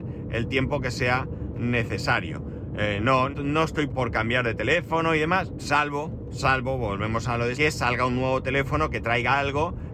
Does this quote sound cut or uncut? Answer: cut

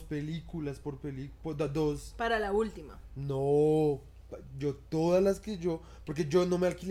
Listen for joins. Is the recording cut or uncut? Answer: uncut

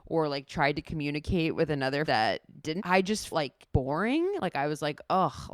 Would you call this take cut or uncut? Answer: cut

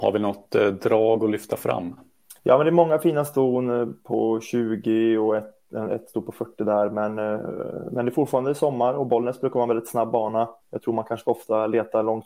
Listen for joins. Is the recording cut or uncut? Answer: cut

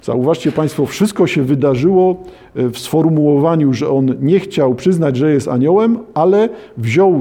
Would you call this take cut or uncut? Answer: uncut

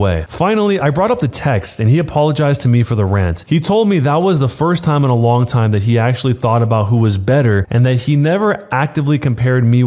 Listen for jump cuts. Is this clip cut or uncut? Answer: uncut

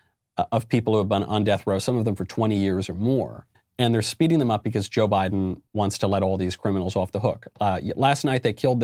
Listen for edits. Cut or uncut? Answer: cut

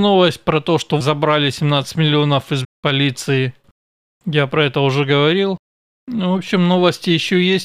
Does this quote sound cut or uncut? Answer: cut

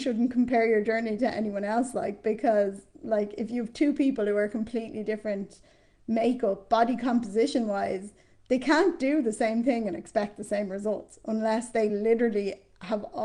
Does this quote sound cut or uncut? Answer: uncut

